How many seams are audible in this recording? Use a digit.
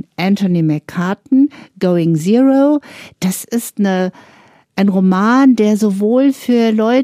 0